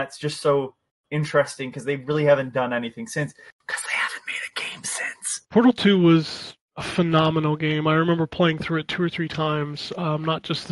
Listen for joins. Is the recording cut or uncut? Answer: cut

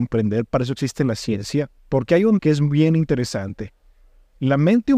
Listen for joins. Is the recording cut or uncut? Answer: cut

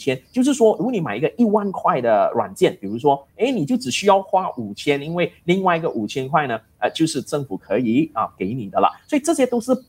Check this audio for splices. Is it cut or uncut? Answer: uncut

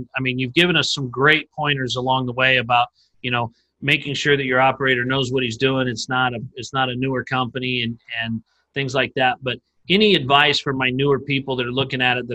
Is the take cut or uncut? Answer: uncut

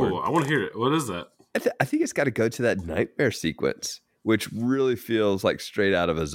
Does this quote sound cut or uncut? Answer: uncut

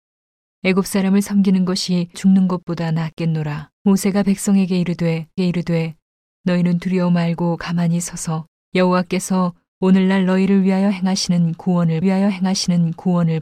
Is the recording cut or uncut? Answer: cut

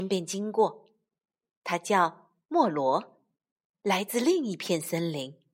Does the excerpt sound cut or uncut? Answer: uncut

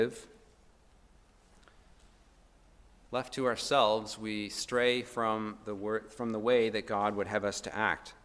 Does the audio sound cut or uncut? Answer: uncut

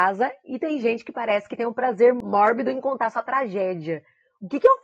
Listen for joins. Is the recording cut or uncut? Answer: uncut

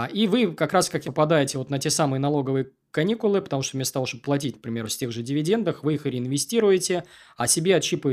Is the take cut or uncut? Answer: cut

